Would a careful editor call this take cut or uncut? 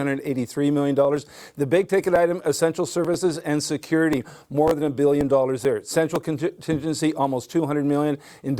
uncut